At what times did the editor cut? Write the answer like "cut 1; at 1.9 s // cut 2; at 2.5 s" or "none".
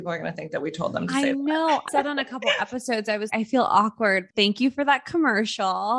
cut 1; at 1.9 s // cut 2; at 3.3 s